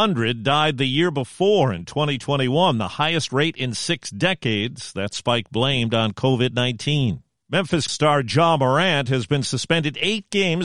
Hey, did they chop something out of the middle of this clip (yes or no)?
yes